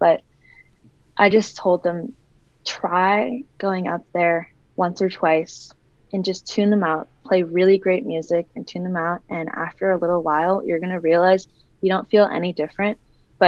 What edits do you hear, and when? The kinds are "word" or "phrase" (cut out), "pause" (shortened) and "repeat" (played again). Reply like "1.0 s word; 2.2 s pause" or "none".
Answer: none